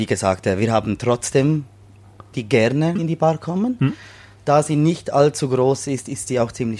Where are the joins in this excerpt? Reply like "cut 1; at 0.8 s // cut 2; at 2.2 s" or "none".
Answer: cut 1; at 2.3 s // cut 2; at 3.0 s